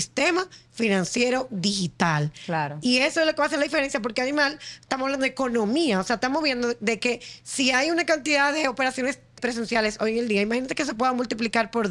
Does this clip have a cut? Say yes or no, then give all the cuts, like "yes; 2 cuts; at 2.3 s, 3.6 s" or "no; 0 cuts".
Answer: yes; 1 cut; at 9.4 s